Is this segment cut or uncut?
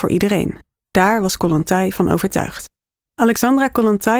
cut